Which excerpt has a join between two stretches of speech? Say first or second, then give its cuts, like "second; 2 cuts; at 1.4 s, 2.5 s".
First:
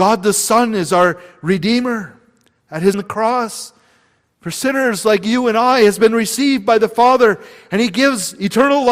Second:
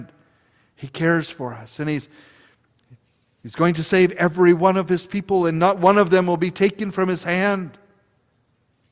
first; 1 cut; at 2.9 s